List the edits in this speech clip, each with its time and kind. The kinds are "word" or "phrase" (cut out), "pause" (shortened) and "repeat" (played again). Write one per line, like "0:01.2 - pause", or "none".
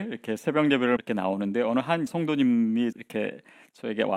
0:01.0 - word
0:02.1 - word
0:02.9 - word